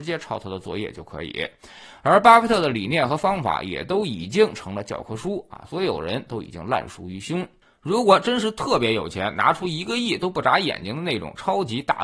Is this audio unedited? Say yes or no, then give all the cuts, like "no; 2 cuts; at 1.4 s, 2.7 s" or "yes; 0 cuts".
yes; 0 cuts